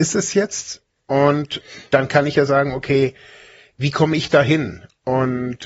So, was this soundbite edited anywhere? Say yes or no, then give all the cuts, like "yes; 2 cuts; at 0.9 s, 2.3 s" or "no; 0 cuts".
no; 0 cuts